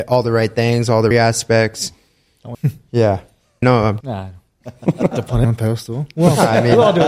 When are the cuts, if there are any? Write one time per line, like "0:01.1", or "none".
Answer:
0:01.1
0:02.5
0:03.6
0:04.0
0:05.1
0:05.4